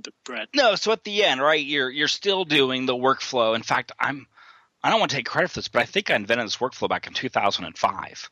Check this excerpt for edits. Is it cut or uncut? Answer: uncut